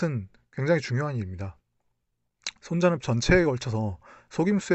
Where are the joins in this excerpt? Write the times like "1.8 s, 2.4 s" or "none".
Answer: 3.0 s